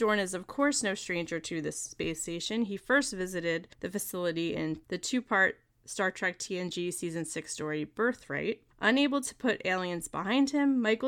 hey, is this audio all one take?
no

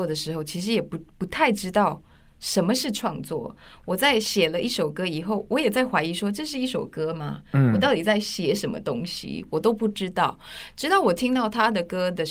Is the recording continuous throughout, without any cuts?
yes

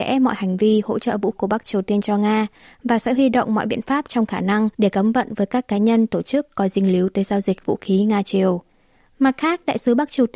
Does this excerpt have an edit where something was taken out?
yes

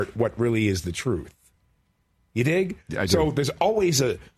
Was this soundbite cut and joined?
no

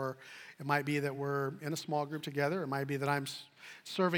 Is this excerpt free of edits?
yes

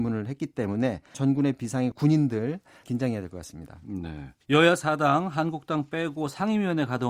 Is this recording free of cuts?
no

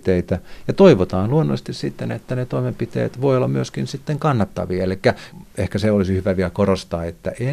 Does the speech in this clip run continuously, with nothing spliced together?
yes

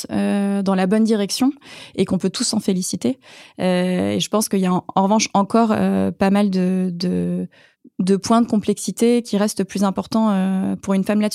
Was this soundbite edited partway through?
no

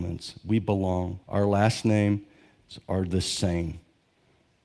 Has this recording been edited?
yes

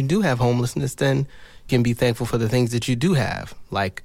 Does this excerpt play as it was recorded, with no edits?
no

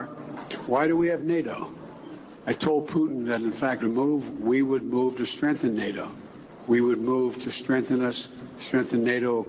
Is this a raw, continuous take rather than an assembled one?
no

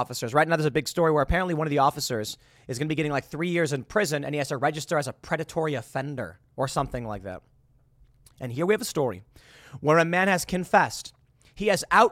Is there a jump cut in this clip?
no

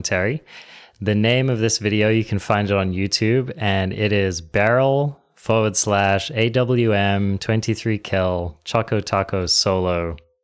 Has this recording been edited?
no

